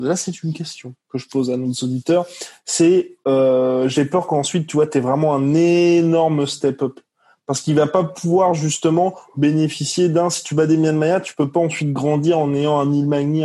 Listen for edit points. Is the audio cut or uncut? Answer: uncut